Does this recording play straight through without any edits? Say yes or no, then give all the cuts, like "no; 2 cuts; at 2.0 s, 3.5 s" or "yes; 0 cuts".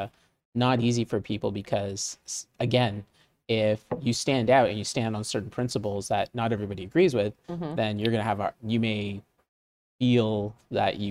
no; 1 cut; at 8.5 s